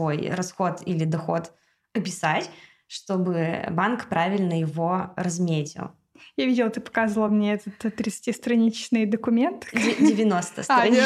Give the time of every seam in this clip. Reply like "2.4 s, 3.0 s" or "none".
none